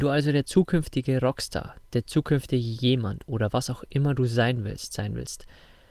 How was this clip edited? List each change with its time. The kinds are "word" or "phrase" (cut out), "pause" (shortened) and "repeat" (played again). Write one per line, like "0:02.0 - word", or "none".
none